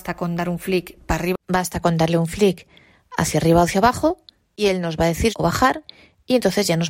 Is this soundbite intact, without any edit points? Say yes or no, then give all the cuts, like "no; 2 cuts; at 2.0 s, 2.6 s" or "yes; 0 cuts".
no; 1 cut; at 5.3 s